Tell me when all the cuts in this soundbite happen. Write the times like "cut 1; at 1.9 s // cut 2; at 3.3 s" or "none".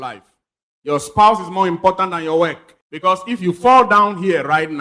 cut 1; at 2.8 s